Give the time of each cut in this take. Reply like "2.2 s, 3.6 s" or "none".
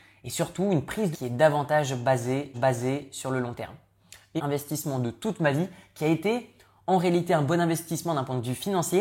1.1 s, 2.5 s, 4.4 s